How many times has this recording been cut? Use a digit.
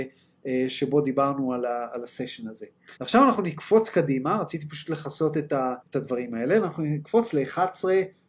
2